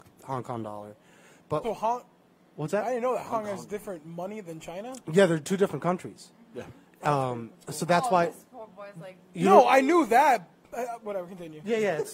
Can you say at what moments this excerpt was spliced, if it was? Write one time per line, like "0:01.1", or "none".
0:01.6
0:03.3

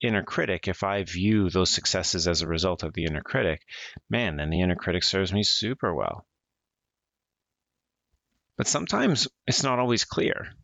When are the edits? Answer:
none

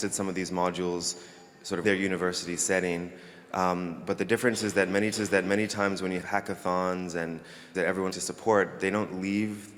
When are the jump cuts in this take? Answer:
0:01.8
0:05.1
0:06.2
0:07.7
0:08.1

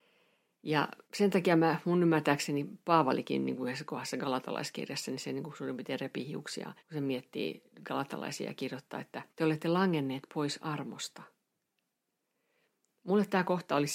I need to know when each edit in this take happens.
0:01.0
0:06.8
0:07.7
0:09.3

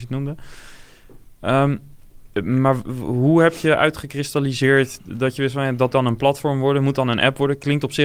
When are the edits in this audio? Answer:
0:05.9

